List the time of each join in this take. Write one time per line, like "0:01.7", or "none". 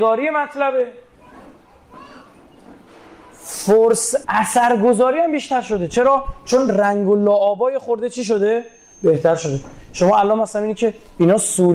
0:04.2